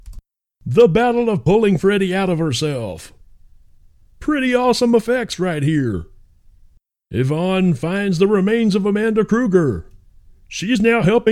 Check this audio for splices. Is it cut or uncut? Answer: uncut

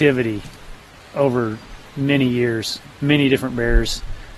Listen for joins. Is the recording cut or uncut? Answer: cut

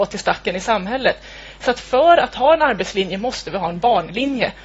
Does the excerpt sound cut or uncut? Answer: uncut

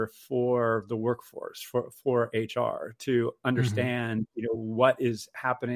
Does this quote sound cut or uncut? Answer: uncut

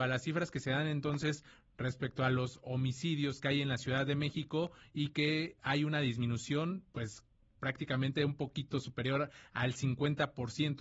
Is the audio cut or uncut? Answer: uncut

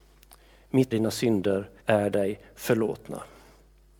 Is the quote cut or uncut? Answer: cut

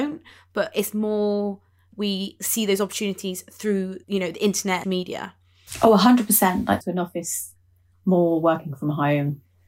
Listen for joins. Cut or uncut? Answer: cut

